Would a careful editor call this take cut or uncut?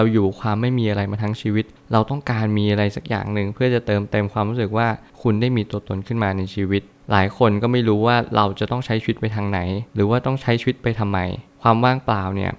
cut